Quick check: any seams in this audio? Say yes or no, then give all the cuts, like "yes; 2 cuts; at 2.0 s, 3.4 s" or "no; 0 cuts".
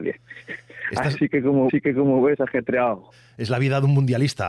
yes; 1 cut; at 1.7 s